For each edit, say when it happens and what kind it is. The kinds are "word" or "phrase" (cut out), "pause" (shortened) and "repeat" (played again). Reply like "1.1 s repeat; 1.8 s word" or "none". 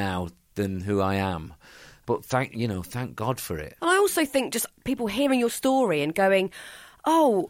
none